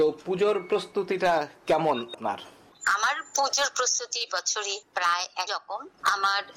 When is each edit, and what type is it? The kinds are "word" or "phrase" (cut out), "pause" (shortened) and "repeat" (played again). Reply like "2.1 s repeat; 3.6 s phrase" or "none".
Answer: 2.1 s word; 4.3 s word; 5.5 s word